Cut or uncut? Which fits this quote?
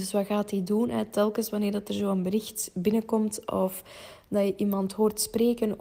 uncut